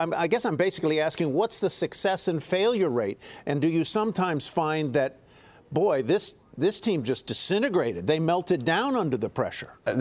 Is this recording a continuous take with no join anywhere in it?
yes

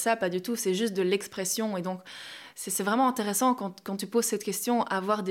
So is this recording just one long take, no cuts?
yes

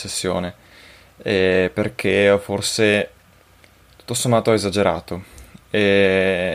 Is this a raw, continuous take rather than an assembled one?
yes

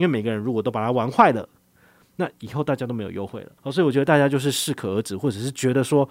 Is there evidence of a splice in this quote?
yes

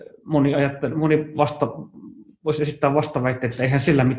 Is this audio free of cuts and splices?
yes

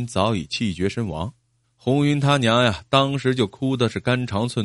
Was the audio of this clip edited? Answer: yes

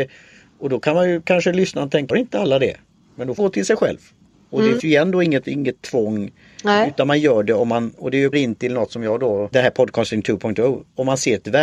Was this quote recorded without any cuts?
no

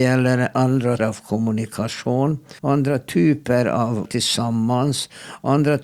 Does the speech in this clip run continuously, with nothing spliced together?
no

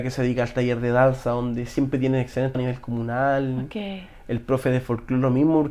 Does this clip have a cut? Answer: yes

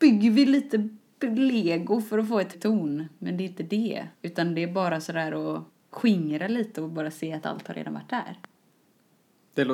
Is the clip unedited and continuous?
no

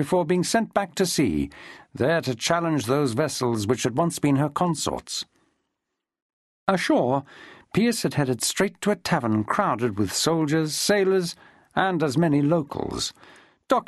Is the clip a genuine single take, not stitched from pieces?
yes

